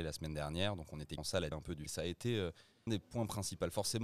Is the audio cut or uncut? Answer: cut